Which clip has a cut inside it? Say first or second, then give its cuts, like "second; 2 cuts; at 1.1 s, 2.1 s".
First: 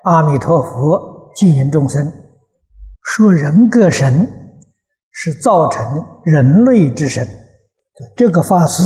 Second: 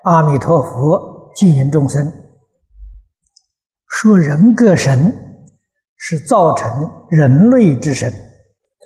first; 1 cut; at 2.9 s